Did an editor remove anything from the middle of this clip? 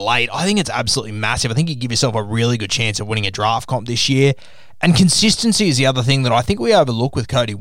no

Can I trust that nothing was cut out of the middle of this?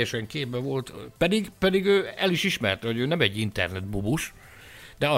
yes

